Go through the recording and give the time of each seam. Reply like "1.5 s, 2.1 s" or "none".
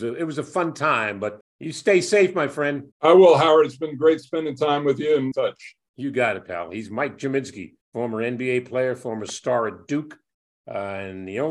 1.4 s, 2.9 s, 5.3 s, 7.8 s